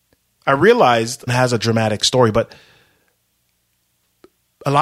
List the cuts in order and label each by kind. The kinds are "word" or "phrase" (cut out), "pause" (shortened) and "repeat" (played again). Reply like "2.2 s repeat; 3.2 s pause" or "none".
1.3 s phrase